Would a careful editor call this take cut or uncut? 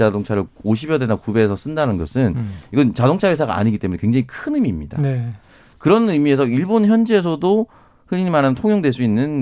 uncut